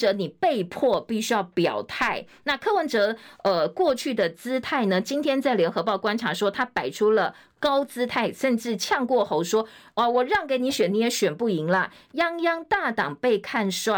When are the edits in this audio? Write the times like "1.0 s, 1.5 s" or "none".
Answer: none